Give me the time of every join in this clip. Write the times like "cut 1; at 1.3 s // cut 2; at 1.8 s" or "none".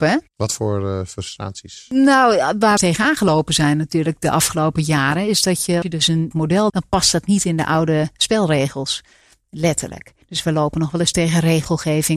cut 1; at 2.8 s // cut 2; at 5.8 s // cut 3; at 6.3 s // cut 4; at 6.7 s // cut 5; at 10.2 s